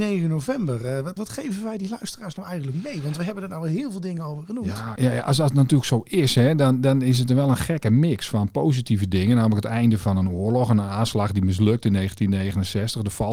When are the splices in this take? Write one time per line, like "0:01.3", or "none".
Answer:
0:01.2
0:05.0